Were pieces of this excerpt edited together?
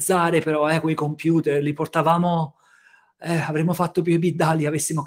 no; 0 cuts

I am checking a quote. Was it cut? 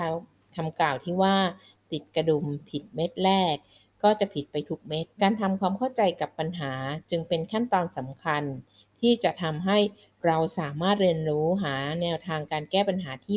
yes; 1 cut; at 5.1 s

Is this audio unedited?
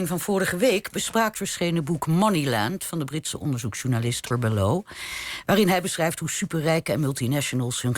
no; 2 cuts; at 1.3 s, 4.3 s

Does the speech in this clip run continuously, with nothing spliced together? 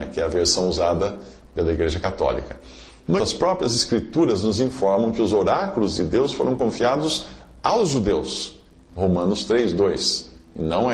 no; 1 cut; at 3.2 s

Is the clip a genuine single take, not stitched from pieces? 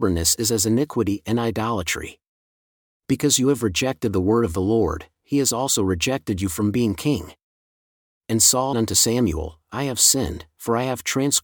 no; 1 cut; at 8.7 s

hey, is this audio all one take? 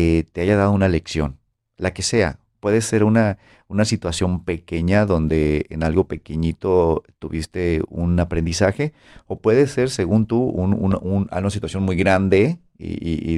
yes; 0 cuts

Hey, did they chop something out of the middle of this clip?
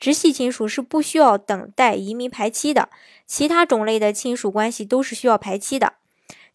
no; 0 cuts

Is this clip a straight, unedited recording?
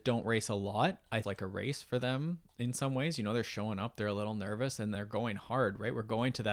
no; 2 cuts; at 1.2 s, 4.9 s

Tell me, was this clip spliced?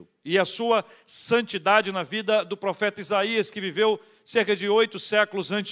no; 0 cuts

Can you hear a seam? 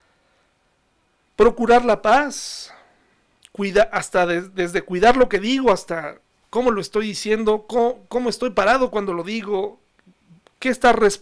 no; 0 cuts

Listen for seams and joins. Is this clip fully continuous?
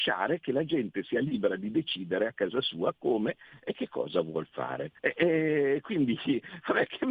no; 1 cut; at 5.0 s

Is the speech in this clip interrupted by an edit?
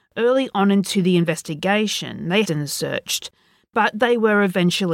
yes; 1 cut; at 2.4 s

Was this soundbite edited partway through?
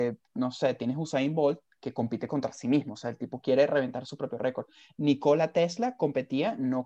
no; 0 cuts

